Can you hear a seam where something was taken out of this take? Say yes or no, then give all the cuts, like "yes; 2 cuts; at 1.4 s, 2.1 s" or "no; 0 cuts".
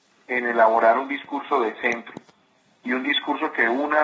no; 0 cuts